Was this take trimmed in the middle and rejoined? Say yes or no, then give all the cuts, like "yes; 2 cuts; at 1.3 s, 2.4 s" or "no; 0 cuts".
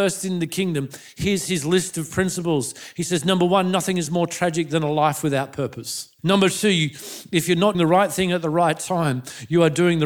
yes; 2 cuts; at 6.2 s, 7.7 s